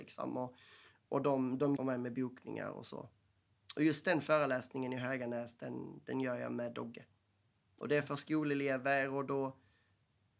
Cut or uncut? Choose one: cut